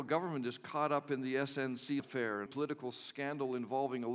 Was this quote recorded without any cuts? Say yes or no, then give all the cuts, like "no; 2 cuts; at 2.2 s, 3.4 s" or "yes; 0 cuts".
no; 2 cuts; at 2.0 s, 2.5 s